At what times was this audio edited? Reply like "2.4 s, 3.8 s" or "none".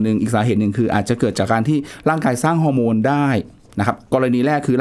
none